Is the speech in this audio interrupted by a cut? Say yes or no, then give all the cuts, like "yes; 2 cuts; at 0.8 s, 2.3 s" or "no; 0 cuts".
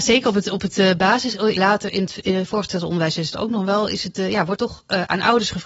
yes; 2 cuts; at 1.6 s, 4.6 s